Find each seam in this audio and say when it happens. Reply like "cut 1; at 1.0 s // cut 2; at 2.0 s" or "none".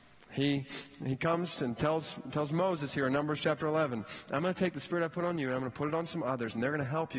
none